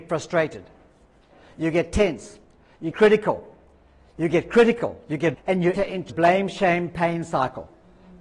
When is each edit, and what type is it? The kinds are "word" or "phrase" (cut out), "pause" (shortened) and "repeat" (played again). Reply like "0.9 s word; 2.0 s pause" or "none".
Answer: 2.9 s word; 5.3 s word; 5.8 s word; 6.1 s word